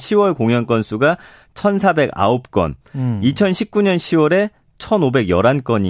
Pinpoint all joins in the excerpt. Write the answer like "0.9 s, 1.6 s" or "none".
none

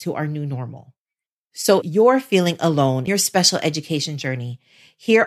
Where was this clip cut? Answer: 1.8 s, 3.1 s

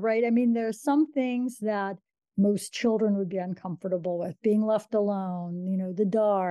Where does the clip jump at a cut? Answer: none

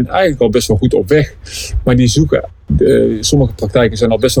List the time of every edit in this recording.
none

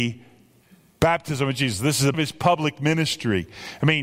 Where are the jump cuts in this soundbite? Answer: 2.1 s

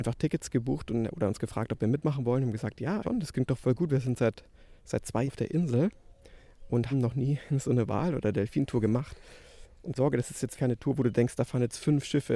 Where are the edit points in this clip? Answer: 3.0 s, 4.8 s, 5.3 s, 6.9 s, 10.0 s, 10.6 s

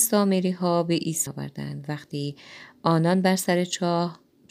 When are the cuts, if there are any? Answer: 1.3 s

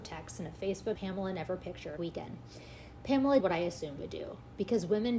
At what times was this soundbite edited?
1.0 s, 2.0 s, 3.4 s, 4.0 s

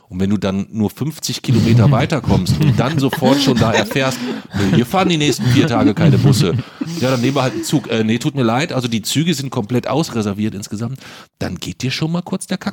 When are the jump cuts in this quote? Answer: none

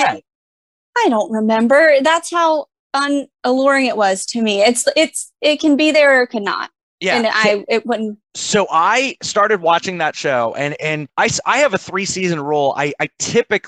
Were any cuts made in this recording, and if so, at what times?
none

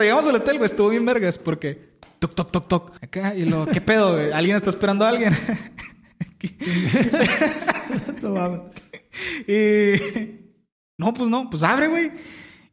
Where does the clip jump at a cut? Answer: 3.0 s

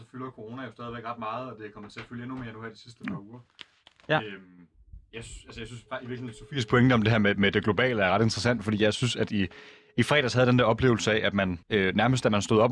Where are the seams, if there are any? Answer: 11.6 s

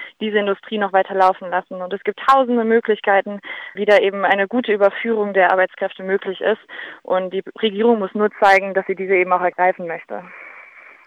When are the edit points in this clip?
3.8 s

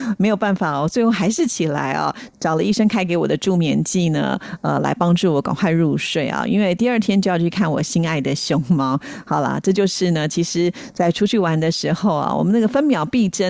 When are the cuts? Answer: none

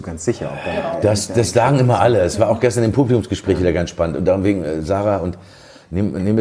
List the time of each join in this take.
none

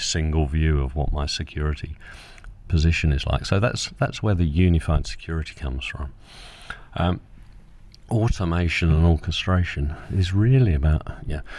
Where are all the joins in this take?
2.7 s

